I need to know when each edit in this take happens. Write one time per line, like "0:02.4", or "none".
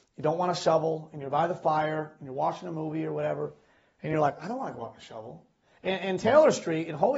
none